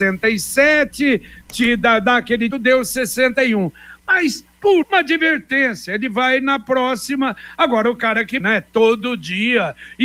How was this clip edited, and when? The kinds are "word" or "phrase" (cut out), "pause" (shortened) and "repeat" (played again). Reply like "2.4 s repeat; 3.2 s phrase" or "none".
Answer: 2.5 s word; 4.8 s word; 8.4 s word